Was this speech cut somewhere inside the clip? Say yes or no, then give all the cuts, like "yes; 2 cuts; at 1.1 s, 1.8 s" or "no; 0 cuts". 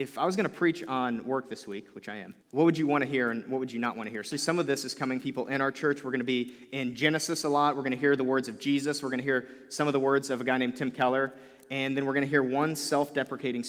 yes; 3 cuts; at 2.4 s, 4.3 s, 5.2 s